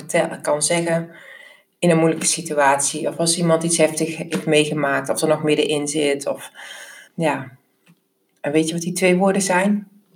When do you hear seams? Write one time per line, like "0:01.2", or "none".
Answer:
0:07.1